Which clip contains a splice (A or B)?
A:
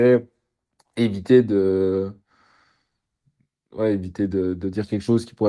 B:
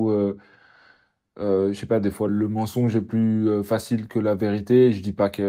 B